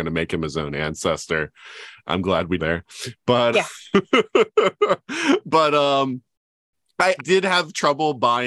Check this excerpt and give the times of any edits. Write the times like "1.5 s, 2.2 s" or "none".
2.6 s, 3.5 s, 7.2 s